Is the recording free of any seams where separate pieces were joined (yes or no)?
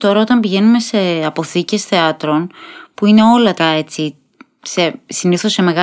no